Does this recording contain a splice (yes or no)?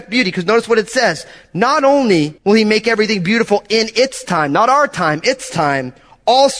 yes